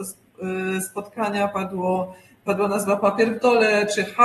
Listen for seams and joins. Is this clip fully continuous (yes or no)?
yes